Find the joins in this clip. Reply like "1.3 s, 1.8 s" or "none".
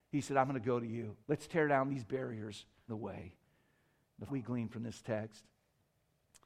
1.2 s, 2.9 s, 4.3 s